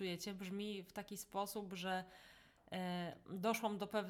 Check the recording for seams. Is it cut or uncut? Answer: uncut